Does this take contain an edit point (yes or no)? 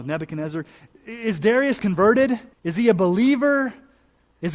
yes